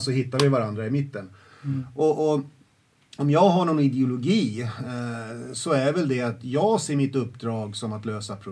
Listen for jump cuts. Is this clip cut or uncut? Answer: uncut